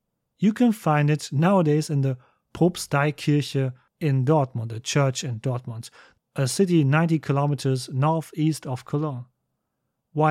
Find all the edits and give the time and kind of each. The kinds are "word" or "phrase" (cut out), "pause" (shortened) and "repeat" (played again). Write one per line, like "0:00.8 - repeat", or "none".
none